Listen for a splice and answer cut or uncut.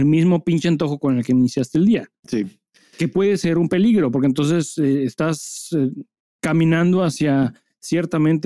uncut